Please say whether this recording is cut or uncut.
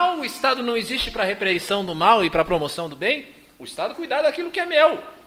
cut